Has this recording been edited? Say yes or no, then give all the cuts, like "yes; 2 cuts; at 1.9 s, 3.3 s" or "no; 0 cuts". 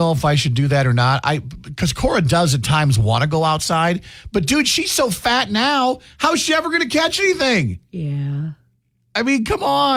no; 0 cuts